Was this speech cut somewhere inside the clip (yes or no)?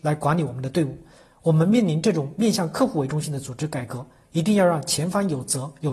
no